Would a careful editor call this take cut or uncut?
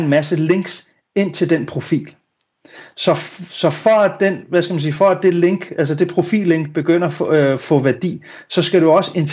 uncut